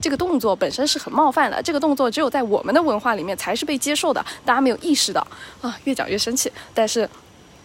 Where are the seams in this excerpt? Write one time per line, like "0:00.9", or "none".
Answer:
0:06.7